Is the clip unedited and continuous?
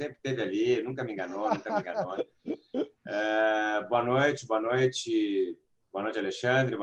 no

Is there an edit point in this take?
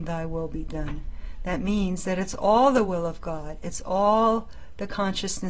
no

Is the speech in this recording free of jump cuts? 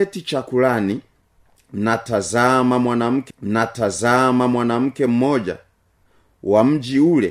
no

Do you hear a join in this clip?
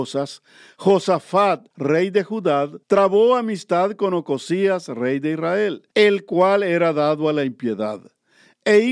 yes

